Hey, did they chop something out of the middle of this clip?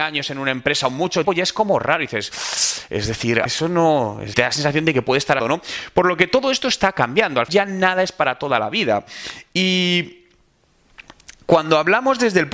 yes; 5 cuts; at 1.2 s, 3.5 s, 4.3 s, 5.4 s, 7.5 s

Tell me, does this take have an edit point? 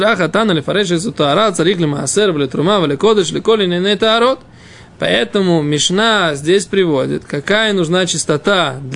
no; 0 cuts

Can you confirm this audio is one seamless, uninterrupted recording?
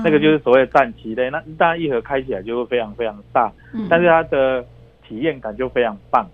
yes; 0 cuts

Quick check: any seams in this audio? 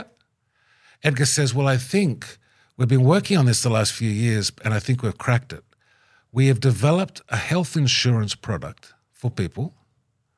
yes; 1 cut; at 9.3 s

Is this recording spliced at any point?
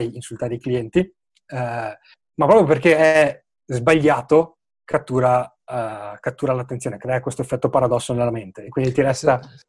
no; 0 cuts

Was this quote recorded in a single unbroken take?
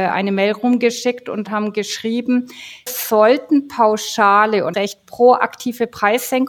no; 2 cuts; at 2.9 s, 4.7 s

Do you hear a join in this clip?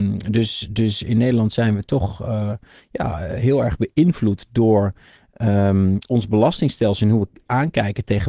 no; 0 cuts

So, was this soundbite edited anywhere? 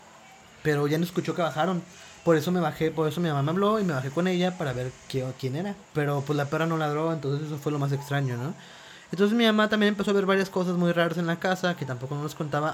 yes; 1 cut; at 5.8 s

